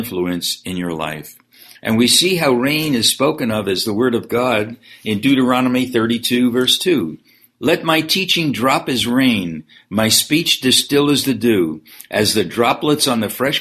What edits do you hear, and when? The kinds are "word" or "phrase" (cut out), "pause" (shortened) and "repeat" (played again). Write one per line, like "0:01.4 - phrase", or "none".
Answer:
none